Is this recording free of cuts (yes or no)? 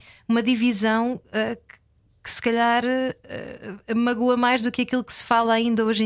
yes